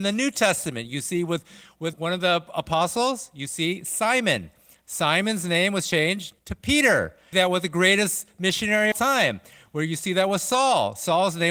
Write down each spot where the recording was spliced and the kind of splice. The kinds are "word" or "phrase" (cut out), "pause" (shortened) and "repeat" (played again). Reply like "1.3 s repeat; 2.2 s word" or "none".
1.9 s word; 6.4 s pause; 7.3 s phrase; 8.9 s phrase